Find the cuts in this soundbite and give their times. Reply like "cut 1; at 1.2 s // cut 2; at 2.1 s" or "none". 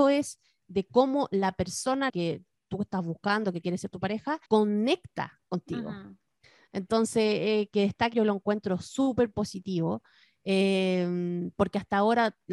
cut 1; at 2.1 s // cut 2; at 4.5 s // cut 3; at 8.1 s